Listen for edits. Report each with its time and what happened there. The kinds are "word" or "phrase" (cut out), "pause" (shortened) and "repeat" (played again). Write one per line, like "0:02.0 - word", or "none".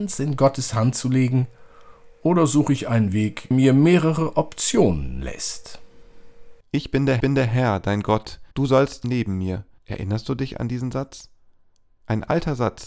0:03.5 - word
0:06.6 - pause
0:07.2 - repeat
0:08.5 - pause
0:09.0 - phrase
0:09.8 - pause